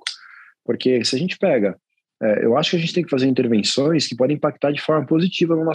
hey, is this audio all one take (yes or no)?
yes